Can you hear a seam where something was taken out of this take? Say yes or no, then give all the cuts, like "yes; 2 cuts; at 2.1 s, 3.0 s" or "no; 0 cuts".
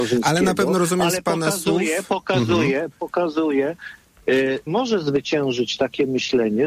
yes; 1 cut; at 4.7 s